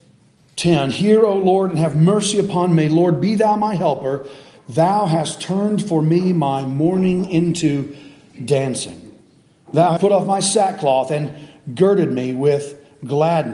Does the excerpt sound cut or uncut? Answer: cut